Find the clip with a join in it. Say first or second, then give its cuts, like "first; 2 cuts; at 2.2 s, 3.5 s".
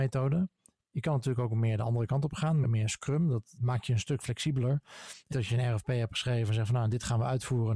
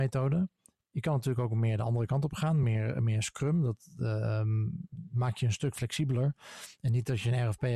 first; 3 cuts; at 2.6 s, 3.6 s, 5.3 s